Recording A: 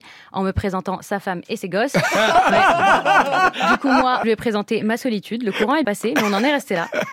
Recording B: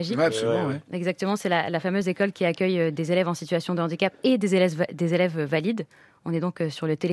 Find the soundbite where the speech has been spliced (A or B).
A